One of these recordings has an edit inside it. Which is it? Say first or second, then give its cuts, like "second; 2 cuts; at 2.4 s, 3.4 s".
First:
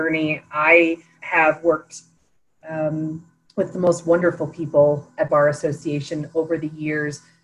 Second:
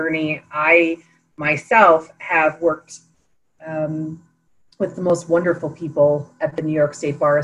first; 3 cuts; at 1.2 s, 3.4 s, 5.3 s